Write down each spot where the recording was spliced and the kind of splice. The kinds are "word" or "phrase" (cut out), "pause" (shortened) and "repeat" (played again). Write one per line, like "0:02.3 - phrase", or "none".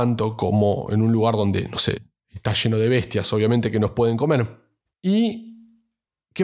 none